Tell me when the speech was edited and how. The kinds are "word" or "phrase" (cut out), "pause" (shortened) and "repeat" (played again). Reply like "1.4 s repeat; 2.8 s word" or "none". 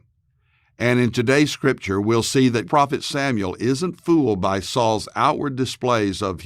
2.7 s word